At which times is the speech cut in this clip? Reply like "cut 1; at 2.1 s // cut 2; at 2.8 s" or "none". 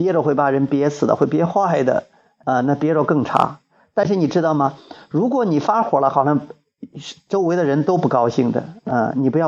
none